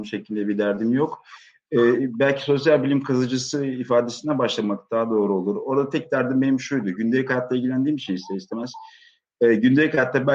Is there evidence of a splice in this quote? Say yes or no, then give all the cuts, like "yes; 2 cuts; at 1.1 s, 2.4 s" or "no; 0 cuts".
no; 0 cuts